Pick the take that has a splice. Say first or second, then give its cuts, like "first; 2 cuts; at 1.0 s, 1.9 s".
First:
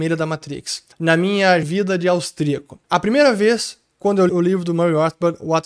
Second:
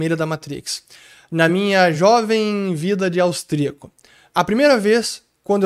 first; 4 cuts; at 0.9 s, 1.6 s, 2.8 s, 4.3 s